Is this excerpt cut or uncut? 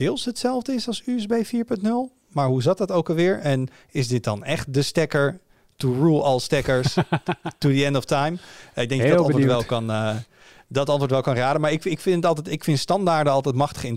uncut